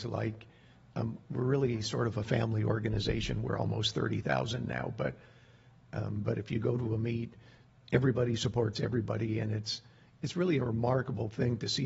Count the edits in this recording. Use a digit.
0